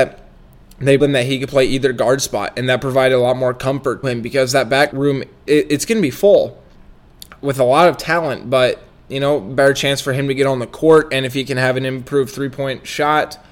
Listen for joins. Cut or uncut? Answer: cut